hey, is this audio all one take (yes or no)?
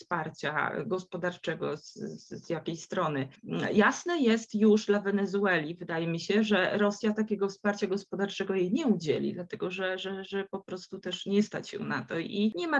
yes